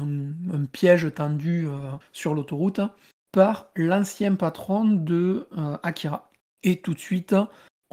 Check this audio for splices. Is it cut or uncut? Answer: uncut